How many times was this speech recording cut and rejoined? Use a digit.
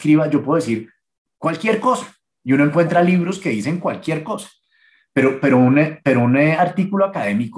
0